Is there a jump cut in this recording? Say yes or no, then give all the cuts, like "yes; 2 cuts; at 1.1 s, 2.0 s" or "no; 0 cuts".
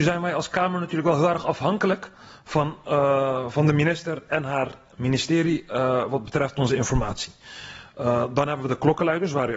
no; 0 cuts